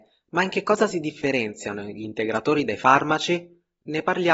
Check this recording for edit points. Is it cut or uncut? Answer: uncut